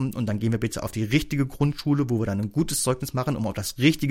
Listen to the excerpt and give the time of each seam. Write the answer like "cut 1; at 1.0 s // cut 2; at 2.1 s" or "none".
none